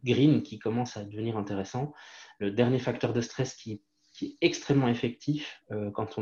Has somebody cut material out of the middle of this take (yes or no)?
no